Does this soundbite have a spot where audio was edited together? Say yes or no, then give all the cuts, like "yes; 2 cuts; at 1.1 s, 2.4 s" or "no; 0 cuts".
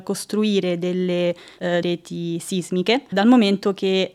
yes; 2 cuts; at 1.8 s, 3.1 s